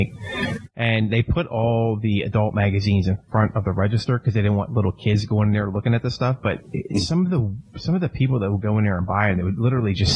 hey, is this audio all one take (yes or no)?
yes